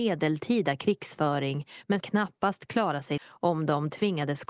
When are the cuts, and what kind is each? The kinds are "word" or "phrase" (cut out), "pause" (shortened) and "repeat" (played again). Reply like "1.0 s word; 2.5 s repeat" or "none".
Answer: 2.0 s word; 3.2 s word